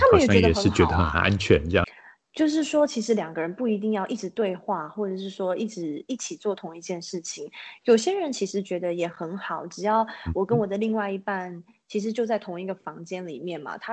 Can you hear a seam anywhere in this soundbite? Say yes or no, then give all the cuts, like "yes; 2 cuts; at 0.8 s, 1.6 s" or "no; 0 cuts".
no; 0 cuts